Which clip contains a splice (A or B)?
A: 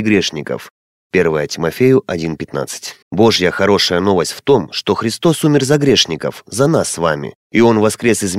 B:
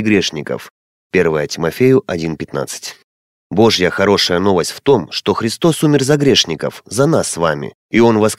A